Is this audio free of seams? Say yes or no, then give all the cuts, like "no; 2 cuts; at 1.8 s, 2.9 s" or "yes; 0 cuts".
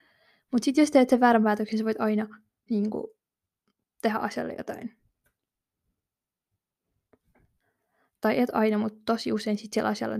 yes; 0 cuts